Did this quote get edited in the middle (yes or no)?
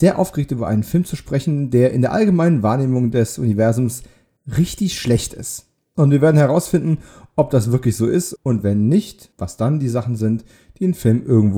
no